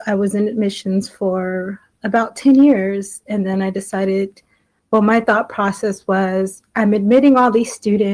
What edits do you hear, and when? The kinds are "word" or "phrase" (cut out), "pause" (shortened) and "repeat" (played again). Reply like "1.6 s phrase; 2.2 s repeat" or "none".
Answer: none